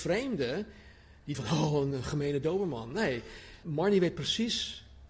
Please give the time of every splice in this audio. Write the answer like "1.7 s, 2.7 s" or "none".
1.3 s, 1.9 s, 3.6 s